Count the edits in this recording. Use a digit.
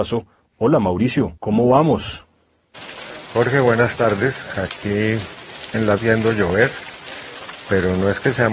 2